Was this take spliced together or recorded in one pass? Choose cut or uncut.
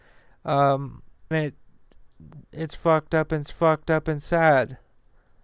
cut